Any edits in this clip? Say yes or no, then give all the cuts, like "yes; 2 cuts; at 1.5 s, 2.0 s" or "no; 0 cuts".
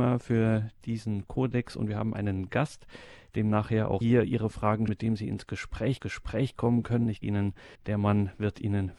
yes; 5 cuts; at 4.0 s, 4.9 s, 6.0 s, 7.2 s, 7.7 s